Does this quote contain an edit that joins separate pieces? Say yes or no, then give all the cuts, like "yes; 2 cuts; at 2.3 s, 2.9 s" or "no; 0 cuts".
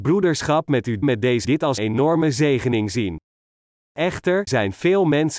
yes; 4 cuts; at 1.0 s, 1.4 s, 1.8 s, 4.5 s